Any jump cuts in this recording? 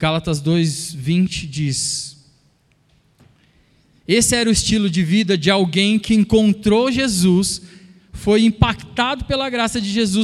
no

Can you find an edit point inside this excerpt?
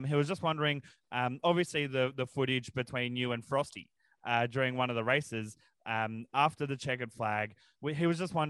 no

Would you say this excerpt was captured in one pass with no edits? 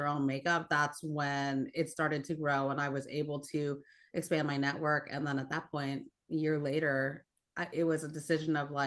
yes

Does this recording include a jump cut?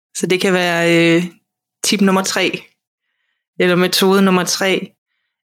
no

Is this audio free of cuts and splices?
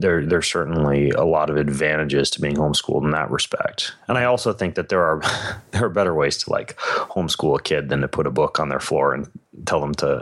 yes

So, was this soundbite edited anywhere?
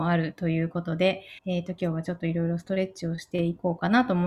yes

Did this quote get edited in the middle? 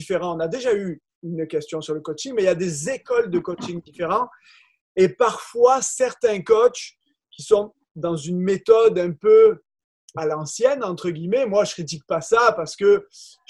no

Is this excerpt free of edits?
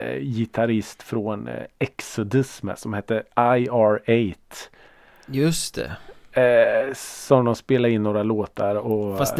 yes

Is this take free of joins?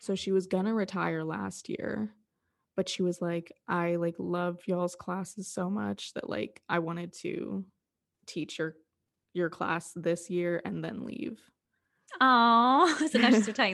yes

